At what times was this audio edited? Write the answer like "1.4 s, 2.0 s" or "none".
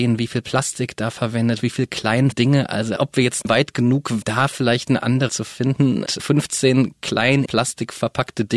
1.6 s, 2.3 s, 3.0 s, 3.4 s, 4.2 s, 5.3 s, 6.1 s, 7.5 s